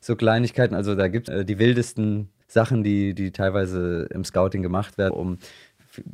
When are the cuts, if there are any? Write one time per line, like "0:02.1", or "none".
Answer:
0:01.3
0:05.1